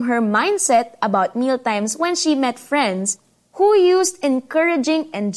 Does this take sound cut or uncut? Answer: uncut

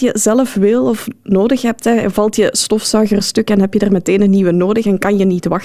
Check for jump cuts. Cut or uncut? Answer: uncut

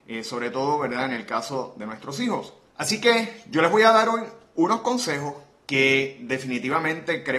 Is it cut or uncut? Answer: uncut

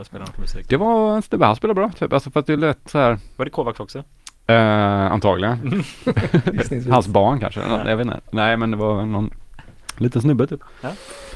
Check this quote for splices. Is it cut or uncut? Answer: uncut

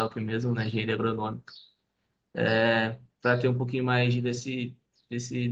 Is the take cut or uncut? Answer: uncut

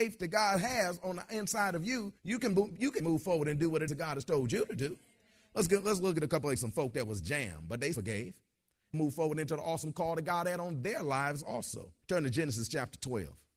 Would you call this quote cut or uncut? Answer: cut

